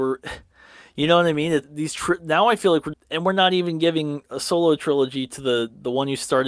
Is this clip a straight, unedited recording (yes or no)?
no